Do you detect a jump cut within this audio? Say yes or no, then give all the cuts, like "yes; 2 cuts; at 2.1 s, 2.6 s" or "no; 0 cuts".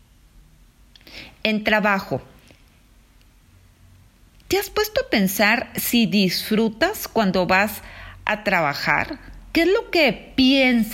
no; 0 cuts